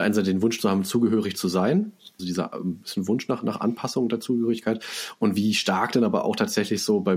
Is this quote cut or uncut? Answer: cut